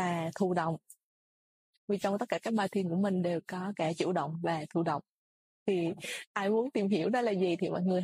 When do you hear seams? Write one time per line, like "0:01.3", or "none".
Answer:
none